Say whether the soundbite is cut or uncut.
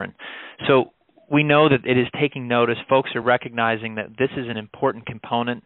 uncut